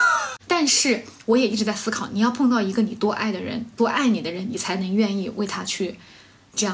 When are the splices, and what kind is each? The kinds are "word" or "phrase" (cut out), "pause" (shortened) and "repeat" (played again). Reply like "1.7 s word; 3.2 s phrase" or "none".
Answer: none